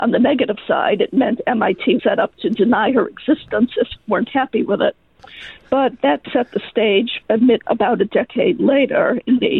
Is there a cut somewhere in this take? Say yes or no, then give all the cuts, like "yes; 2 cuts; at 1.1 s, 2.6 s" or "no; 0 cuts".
yes; 5 cuts; at 2.0 s, 4.0 s, 6.2 s, 7.2 s, 7.6 s